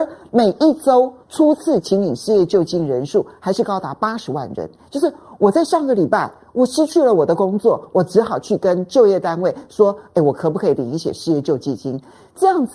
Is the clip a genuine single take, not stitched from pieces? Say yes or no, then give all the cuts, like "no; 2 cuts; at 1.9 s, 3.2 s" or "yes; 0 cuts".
no; 1 cut; at 1.2 s